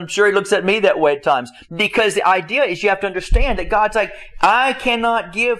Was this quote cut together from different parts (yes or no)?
no